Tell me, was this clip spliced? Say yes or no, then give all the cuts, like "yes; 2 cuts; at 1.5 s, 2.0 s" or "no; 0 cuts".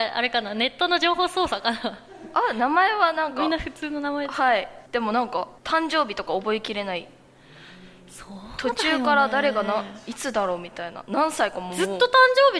yes; 2 cuts; at 4.9 s, 5.6 s